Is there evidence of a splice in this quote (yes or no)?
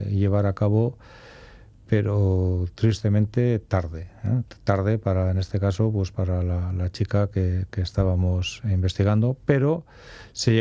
no